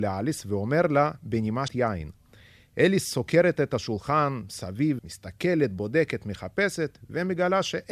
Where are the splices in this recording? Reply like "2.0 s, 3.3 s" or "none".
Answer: 1.7 s, 5.0 s